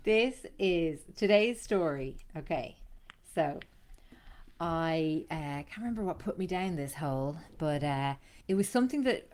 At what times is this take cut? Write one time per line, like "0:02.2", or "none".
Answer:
0:08.4